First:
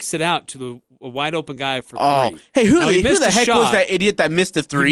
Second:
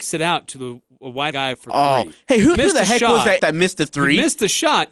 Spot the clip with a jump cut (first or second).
second